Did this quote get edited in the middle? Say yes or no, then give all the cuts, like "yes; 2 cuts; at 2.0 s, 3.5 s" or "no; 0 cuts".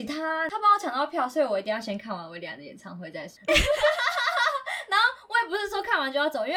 yes; 1 cut; at 3.5 s